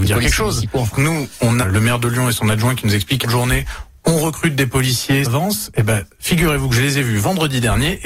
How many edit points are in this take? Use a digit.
4